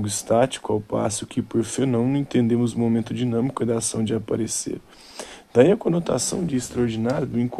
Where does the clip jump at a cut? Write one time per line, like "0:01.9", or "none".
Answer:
none